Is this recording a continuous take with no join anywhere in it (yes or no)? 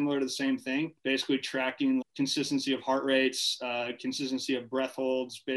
no